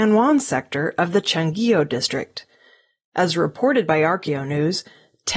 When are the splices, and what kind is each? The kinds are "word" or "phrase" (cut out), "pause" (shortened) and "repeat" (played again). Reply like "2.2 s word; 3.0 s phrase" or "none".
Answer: none

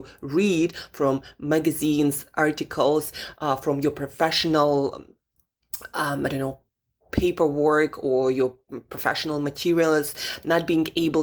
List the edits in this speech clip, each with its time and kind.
none

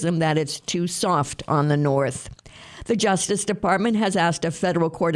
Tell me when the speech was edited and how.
none

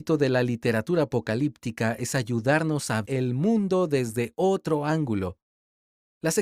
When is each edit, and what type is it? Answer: 3.0 s word

